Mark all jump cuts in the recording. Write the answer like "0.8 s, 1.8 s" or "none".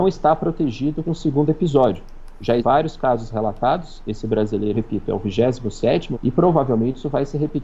1.0 s, 2.6 s, 4.7 s, 6.1 s